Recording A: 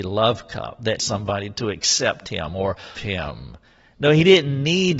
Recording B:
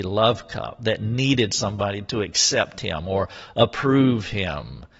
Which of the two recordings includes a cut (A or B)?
A